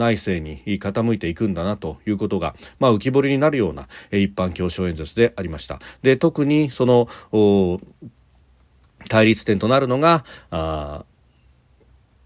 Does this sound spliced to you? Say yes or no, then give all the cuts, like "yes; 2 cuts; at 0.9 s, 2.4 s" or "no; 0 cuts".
no; 0 cuts